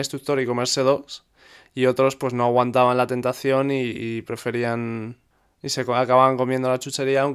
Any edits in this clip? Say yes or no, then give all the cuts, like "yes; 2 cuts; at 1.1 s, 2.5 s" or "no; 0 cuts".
no; 0 cuts